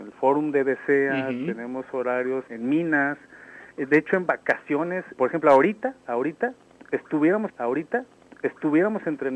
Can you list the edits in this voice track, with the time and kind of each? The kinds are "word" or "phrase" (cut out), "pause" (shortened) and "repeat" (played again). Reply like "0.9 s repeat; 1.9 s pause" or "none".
2.5 s word; 3.7 s pause; 5.1 s word; 7.5 s repeat

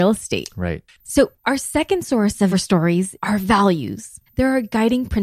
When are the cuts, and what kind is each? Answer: 2.5 s phrase; 3.2 s pause; 4.3 s pause

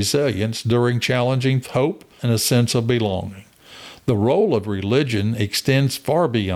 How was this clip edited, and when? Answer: 1.6 s phrase; 2.2 s word

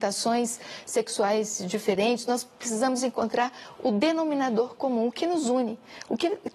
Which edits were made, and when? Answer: none

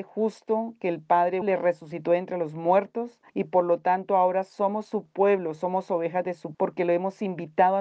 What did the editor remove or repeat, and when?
1.4 s word; 3.3 s pause; 6.5 s word

